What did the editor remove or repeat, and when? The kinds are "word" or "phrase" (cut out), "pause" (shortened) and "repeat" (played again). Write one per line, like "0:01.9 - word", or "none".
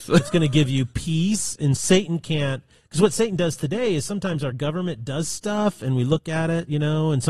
0:01.8 - word